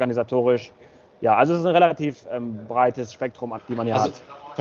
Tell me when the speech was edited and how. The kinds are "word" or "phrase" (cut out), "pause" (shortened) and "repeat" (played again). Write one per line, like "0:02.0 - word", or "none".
0:03.6 - word